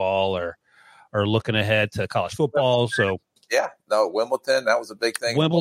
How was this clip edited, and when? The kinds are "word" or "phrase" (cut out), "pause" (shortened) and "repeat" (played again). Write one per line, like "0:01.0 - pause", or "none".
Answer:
none